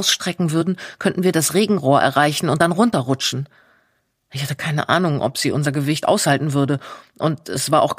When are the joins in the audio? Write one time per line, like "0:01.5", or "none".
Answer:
none